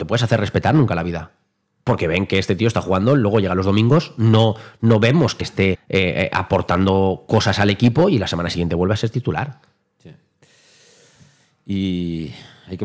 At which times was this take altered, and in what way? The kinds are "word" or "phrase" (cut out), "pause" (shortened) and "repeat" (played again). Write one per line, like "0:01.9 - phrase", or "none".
0:01.6 - pause
0:05.4 - phrase
0:05.7 - word